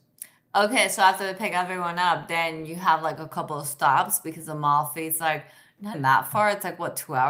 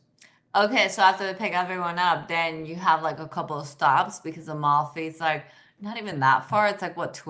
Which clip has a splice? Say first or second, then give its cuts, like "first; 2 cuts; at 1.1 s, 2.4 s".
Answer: first; 1 cut; at 5.9 s